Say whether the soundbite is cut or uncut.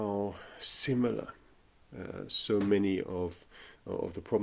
uncut